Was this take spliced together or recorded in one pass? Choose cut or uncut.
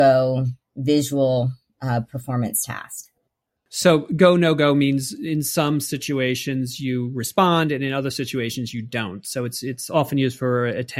uncut